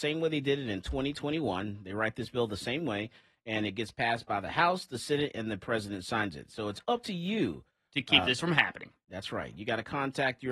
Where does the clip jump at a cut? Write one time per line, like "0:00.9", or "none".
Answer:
none